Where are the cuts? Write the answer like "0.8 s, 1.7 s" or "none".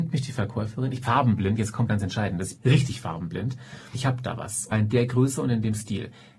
1.0 s, 1.9 s, 2.6 s, 3.9 s, 4.7 s